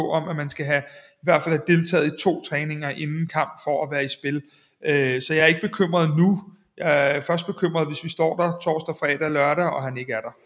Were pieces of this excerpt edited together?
no; 0 cuts

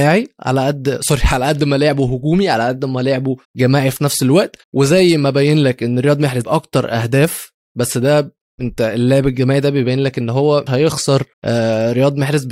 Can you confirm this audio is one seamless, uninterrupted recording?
no; 5 cuts; at 3.4 s, 4.6 s, 6.4 s, 10.7 s, 11.3 s

